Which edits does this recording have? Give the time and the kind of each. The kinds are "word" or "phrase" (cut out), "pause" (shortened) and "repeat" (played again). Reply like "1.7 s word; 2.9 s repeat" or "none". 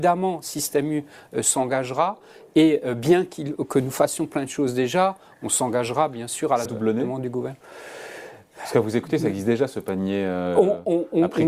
6.6 s phrase